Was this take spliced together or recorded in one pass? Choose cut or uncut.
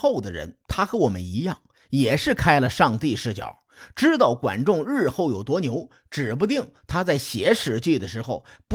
uncut